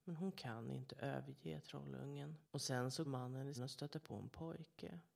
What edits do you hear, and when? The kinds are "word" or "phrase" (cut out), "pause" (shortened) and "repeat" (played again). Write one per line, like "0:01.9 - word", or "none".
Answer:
0:02.4 - pause
0:03.0 - word
0:03.5 - word